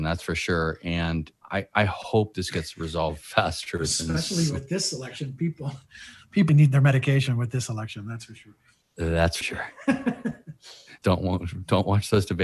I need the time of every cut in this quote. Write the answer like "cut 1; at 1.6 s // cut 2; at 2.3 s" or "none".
cut 1; at 1.4 s // cut 2; at 6.5 s // cut 3; at 9.4 s // cut 4; at 11.0 s